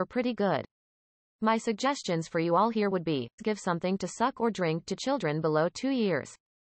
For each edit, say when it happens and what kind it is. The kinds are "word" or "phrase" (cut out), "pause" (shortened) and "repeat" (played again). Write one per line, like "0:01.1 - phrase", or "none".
0:03.4 - word